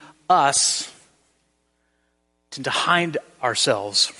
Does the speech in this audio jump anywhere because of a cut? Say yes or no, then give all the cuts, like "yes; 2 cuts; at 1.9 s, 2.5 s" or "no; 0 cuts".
no; 0 cuts